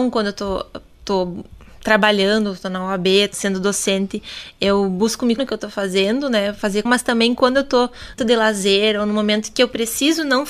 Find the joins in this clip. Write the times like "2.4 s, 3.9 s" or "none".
3.3 s, 5.4 s, 6.8 s, 8.2 s